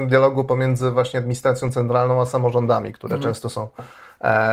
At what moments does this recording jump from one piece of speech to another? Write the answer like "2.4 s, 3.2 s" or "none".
none